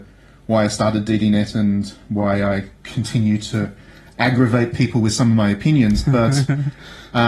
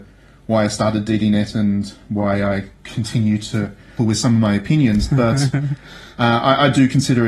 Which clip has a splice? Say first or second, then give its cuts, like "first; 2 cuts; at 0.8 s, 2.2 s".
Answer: second; 1 cut; at 4.0 s